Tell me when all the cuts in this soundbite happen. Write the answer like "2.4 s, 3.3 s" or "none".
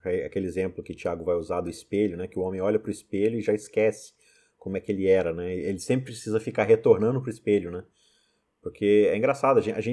none